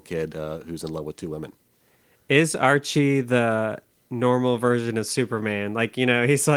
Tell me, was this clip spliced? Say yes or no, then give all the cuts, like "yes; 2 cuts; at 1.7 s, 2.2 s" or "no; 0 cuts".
no; 0 cuts